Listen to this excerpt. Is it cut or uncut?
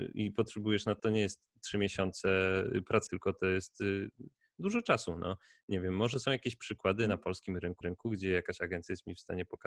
cut